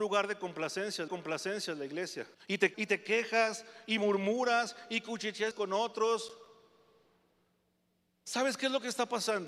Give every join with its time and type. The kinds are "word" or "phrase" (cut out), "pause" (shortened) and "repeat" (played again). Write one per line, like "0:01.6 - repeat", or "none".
0:01.1 - repeat
0:02.3 - pause
0:02.7 - word
0:05.5 - word